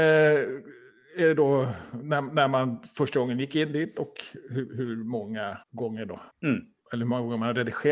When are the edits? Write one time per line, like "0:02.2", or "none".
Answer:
0:05.6
0:06.3

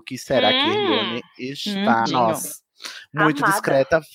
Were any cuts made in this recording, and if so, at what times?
0:02.1

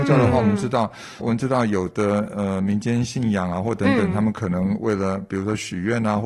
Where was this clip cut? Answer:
0:01.2

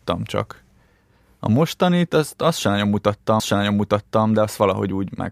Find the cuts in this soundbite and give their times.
0:03.4

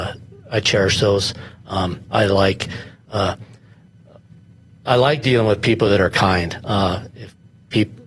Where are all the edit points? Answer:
none

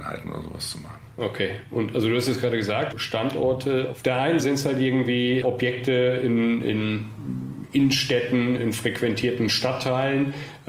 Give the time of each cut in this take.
0:02.9
0:04.4
0:05.4
0:08.6

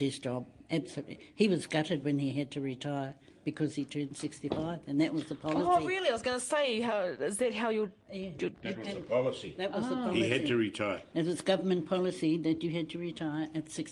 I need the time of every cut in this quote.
0:08.0
0:11.1

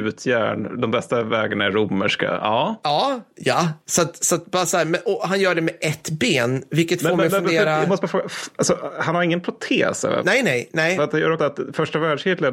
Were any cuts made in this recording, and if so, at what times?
0:11.4

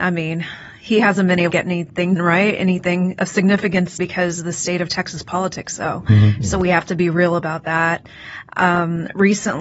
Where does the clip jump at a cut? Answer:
0:01.5
0:02.2
0:04.0

